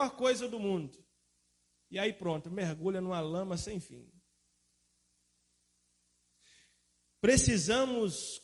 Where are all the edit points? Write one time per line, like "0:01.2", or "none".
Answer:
none